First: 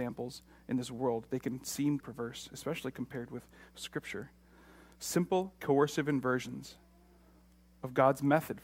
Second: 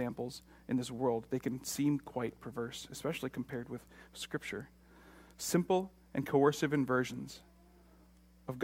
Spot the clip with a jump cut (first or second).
first